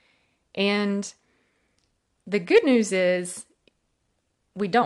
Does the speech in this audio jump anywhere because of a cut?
no; 0 cuts

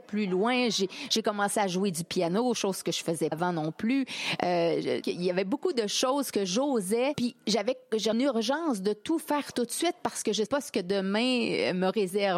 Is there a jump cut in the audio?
yes; 4 cuts; at 3.3 s, 5.0 s, 8.1 s, 10.5 s

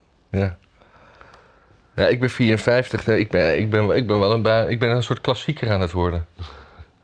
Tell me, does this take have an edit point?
no; 0 cuts

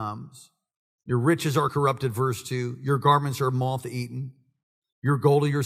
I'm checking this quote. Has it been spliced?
no; 0 cuts

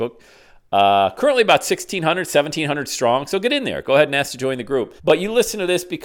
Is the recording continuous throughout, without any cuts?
no; 1 cut; at 5.0 s

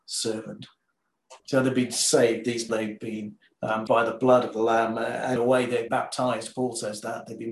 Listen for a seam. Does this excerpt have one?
yes; 5 cuts; at 1.4 s, 2.7 s, 3.9 s, 5.4 s, 5.9 s

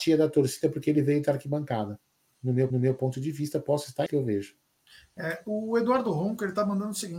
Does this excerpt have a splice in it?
yes; 2 cuts; at 2.7 s, 4.1 s

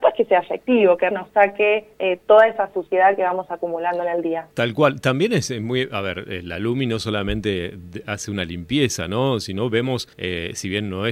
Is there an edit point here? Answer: yes; 4 cuts; at 1.1 s, 1.9 s, 4.5 s, 10.1 s

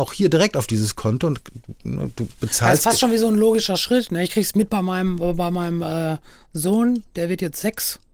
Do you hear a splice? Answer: no; 0 cuts

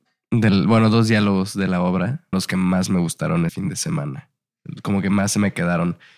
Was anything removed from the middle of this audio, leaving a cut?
yes; 2 cuts; at 2.3 s, 3.5 s

